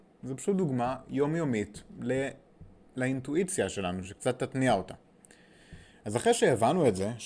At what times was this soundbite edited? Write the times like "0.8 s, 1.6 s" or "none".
none